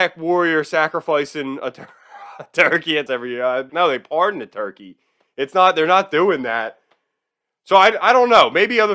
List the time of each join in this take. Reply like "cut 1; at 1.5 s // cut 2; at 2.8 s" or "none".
cut 1; at 3.1 s // cut 2; at 3.7 s